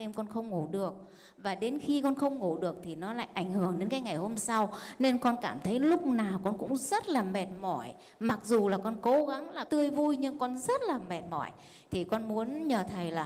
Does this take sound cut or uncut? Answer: cut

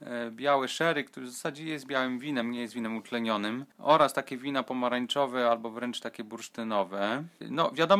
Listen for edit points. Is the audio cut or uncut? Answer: uncut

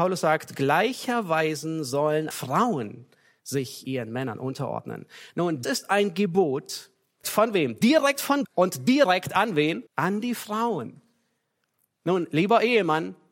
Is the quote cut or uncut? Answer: cut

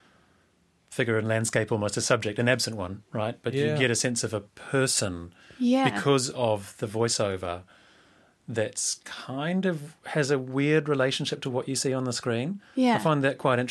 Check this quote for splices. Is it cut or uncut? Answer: uncut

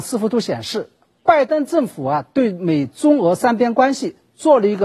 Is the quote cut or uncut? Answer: uncut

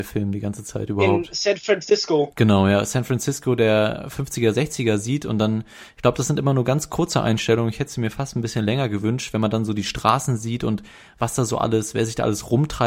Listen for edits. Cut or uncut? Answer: uncut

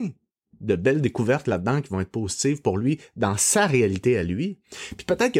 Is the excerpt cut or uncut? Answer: uncut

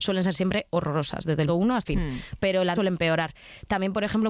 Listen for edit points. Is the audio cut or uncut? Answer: cut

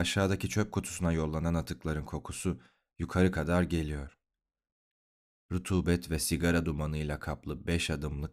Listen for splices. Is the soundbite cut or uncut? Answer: uncut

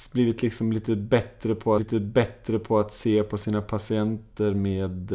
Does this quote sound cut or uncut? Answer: cut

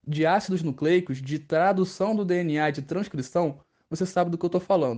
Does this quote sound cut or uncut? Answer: uncut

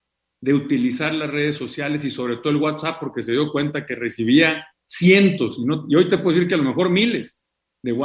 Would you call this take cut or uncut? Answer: uncut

